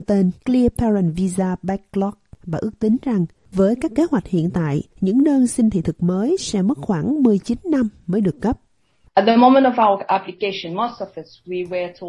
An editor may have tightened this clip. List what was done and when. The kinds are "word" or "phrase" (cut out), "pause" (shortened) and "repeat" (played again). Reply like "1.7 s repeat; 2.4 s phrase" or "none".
4.9 s pause